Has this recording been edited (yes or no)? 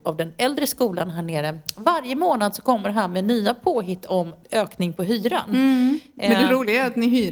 yes